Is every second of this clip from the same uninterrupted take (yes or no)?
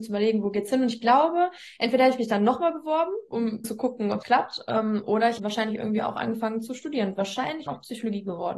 no